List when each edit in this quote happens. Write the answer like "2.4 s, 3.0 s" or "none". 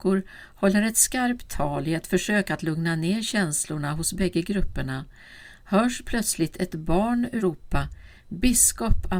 7.4 s